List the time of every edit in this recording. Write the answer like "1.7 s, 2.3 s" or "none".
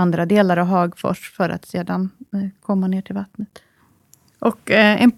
none